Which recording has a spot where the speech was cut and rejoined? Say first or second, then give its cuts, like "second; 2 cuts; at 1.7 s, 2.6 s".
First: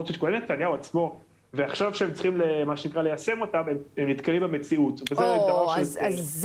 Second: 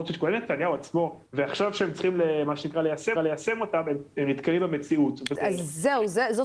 second; 3 cuts; at 1.3 s, 3.2 s, 5.4 s